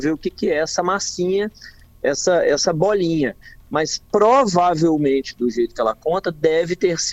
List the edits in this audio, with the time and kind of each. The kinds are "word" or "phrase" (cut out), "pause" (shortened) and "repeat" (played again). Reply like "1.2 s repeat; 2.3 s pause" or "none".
none